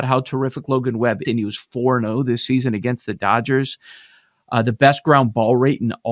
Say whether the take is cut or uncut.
cut